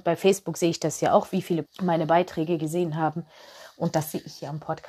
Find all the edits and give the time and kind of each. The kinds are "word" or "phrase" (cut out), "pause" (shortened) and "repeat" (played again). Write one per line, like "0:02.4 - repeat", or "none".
0:01.6 - word